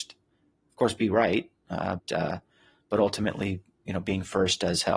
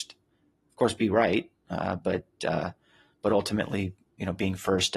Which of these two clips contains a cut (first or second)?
first